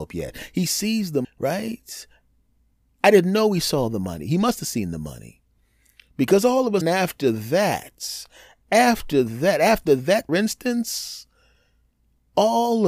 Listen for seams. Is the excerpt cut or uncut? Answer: cut